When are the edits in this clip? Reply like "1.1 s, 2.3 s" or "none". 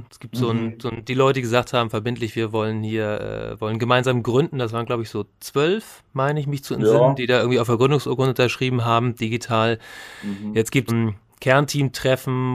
10.9 s